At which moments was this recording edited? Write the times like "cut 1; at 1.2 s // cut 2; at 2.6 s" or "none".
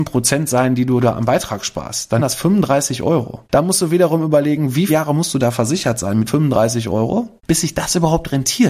cut 1; at 2.2 s // cut 2; at 3.4 s // cut 3; at 4.9 s // cut 4; at 6.3 s // cut 5; at 7.4 s